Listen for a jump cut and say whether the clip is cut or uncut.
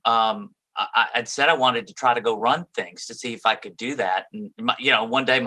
uncut